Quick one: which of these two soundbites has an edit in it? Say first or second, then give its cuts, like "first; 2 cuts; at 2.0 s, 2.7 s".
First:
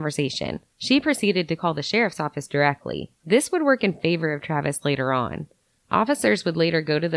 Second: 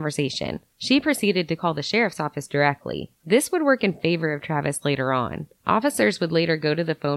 second; 1 cut; at 5.6 s